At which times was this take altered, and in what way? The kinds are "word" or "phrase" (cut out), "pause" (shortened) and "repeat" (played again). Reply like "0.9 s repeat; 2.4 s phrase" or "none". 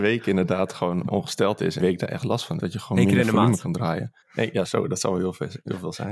1.1 s word; 1.8 s word; 2.6 s word; 4.2 s pause; 4.6 s word